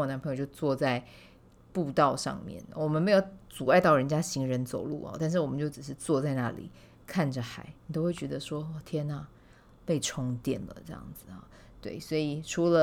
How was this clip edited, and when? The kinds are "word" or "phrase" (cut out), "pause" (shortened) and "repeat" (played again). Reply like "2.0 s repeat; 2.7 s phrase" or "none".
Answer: 7.8 s pause

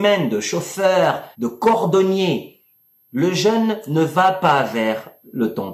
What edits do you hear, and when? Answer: 1.3 s pause

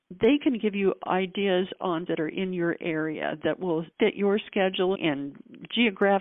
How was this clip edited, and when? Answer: 2.1 s word; 3.9 s pause; 4.9 s word

